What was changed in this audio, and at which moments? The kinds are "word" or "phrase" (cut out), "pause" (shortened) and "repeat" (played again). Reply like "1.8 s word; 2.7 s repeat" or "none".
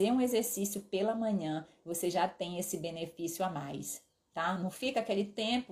none